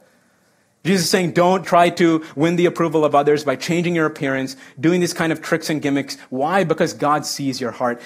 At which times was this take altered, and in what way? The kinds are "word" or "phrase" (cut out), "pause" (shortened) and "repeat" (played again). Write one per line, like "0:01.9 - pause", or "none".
0:01.6 - word